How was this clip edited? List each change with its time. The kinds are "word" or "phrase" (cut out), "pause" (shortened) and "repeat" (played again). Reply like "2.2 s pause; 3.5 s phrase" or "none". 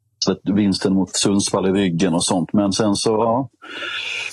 none